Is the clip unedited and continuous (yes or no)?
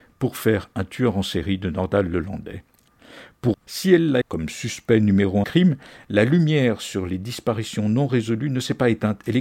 no